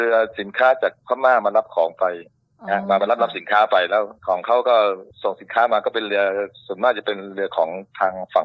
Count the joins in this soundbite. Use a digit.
1